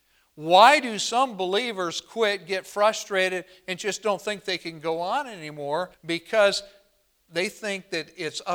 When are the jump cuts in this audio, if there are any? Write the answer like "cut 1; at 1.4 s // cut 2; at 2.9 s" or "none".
cut 1; at 5.9 s